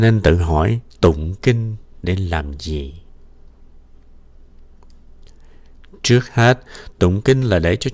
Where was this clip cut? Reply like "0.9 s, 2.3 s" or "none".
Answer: 0.9 s